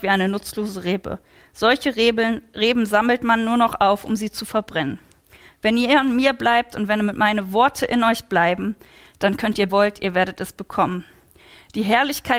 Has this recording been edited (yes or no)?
yes